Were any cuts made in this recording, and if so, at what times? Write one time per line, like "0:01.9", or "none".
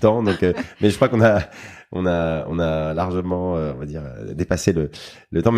none